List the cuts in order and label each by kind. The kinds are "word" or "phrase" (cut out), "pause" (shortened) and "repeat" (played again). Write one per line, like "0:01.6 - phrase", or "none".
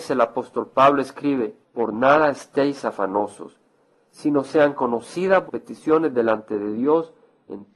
0:01.6 - pause
0:05.5 - word